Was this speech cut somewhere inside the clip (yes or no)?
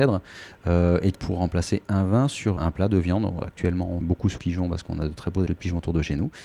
yes